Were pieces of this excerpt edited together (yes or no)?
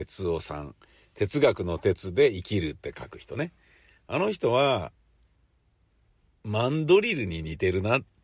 no